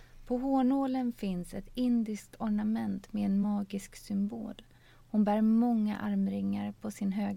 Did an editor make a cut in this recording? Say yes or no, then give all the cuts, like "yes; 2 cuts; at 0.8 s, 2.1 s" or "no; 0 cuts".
no; 0 cuts